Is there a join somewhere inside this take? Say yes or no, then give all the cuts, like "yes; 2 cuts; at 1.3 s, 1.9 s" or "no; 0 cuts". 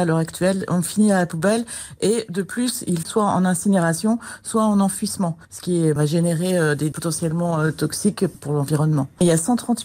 yes; 3 cuts; at 3.0 s, 6.0 s, 6.9 s